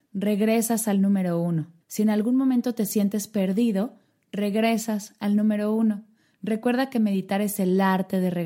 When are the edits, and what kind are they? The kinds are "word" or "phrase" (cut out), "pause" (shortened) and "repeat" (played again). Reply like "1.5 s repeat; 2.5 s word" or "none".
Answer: 1.8 s pause